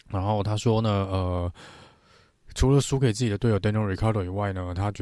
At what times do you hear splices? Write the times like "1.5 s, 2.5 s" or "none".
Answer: none